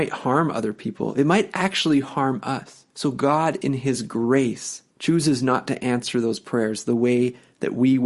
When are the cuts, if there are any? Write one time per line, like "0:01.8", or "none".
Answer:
0:02.9
0:04.9

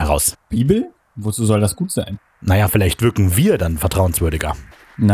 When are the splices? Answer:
none

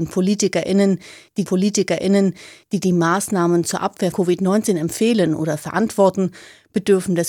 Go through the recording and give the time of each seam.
0:01.5
0:04.1

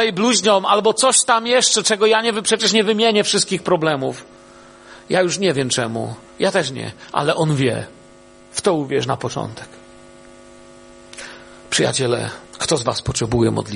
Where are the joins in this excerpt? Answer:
0:06.3
0:12.5

